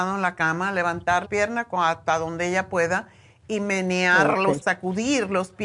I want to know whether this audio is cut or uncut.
cut